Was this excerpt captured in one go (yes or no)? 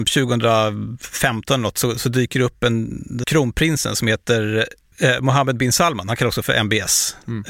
no